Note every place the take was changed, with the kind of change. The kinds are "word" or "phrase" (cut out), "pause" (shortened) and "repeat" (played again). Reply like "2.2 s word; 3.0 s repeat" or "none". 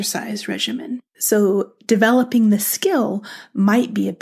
1.1 s pause